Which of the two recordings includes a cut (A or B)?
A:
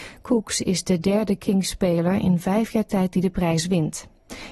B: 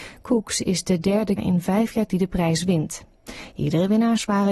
B